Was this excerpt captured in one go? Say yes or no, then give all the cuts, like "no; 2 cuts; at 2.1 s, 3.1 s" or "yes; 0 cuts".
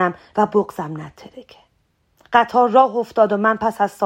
yes; 0 cuts